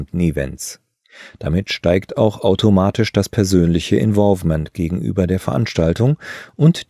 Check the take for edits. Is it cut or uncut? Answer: uncut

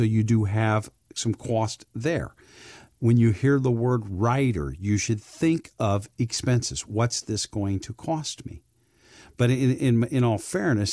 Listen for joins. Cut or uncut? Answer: uncut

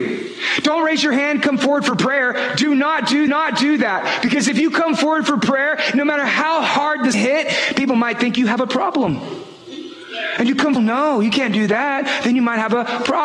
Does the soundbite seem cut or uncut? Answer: cut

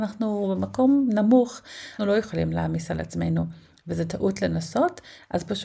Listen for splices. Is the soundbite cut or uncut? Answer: cut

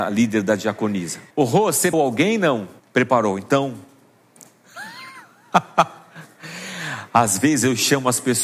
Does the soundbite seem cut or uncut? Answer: cut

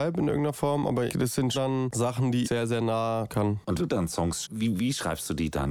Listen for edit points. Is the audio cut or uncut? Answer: cut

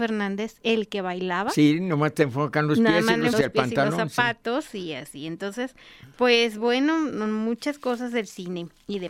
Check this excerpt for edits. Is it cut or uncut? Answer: cut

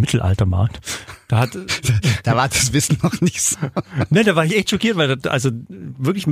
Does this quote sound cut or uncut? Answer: uncut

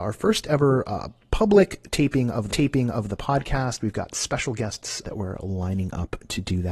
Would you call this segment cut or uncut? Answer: cut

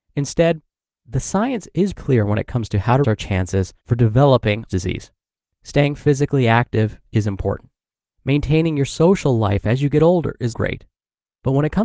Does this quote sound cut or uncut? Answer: cut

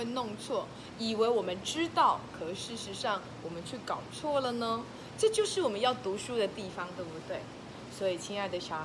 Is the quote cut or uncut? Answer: uncut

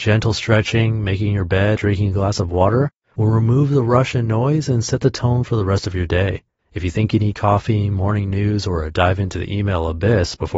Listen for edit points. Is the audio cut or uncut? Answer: cut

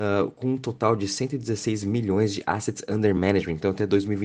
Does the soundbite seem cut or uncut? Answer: uncut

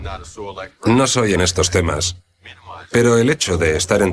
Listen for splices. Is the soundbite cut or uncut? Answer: cut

